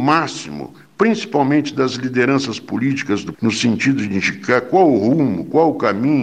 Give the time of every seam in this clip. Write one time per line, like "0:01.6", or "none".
0:03.3